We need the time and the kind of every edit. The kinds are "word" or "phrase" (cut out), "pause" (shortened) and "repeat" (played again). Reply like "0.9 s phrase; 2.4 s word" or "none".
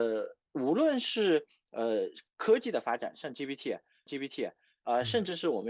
4.1 s repeat